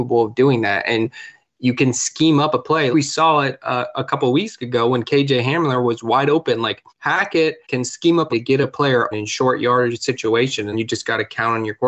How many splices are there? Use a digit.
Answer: 6